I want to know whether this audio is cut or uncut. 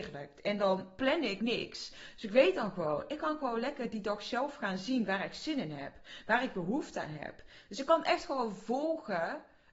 cut